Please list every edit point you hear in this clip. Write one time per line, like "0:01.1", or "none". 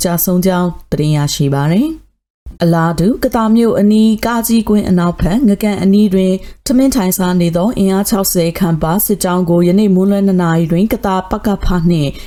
0:02.6